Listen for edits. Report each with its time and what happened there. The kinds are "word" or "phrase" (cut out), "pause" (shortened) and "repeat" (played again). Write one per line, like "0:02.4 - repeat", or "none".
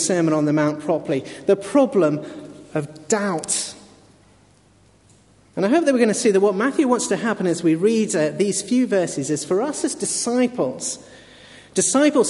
none